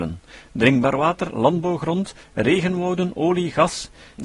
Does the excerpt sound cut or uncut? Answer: uncut